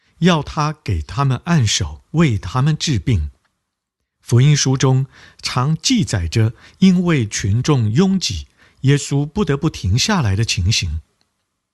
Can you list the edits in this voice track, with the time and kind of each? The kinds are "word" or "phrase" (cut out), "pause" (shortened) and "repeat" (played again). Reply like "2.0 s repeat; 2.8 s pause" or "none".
none